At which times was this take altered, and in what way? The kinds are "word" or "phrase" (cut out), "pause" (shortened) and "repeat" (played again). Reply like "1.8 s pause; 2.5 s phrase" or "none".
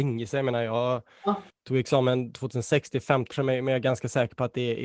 1.5 s pause; 3.3 s word